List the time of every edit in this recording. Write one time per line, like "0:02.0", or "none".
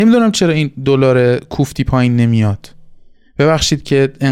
none

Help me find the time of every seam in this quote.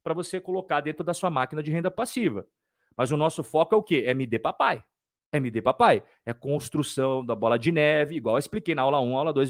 none

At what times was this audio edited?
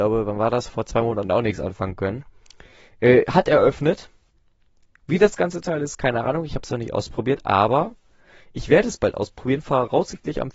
none

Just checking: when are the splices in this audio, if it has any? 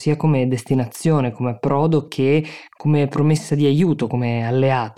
none

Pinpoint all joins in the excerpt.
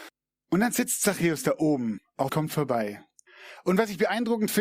0:02.3

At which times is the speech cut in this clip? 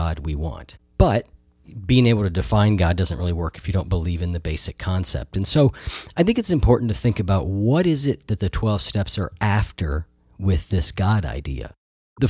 none

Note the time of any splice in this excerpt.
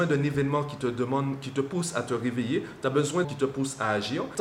0:03.2

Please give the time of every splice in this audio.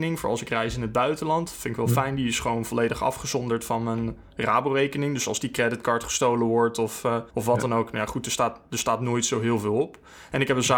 0:07.3

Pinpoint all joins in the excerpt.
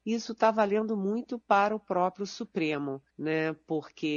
0:03.1

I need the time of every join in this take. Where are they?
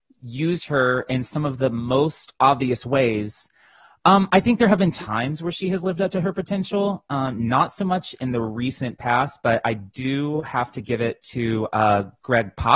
none

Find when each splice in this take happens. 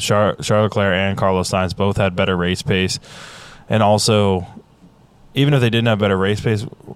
none

